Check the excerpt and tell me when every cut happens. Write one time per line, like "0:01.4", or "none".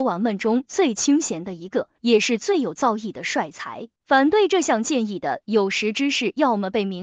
0:01.9
0:03.9